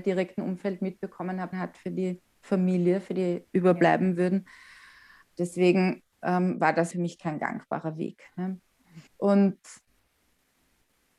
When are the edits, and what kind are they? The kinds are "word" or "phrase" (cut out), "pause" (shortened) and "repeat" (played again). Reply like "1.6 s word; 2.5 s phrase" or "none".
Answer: 1.5 s phrase; 2.3 s pause; 3.5 s word; 6.1 s pause; 6.9 s word; 9.1 s pause